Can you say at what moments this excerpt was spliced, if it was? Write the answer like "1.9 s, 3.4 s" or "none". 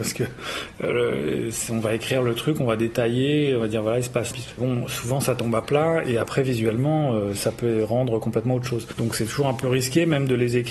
4.3 s